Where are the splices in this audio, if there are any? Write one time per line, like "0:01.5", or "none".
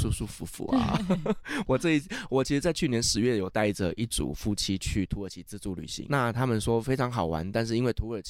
0:06.1